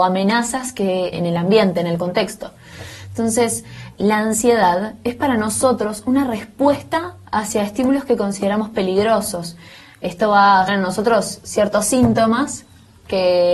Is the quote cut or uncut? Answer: cut